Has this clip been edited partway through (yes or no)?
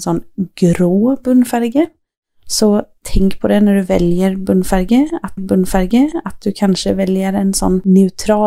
yes